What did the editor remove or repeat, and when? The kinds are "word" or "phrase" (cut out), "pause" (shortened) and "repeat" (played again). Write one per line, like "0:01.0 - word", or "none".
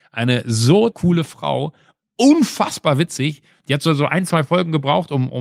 0:00.9 - word